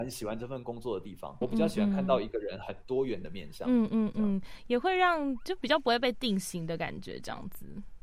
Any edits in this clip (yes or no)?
yes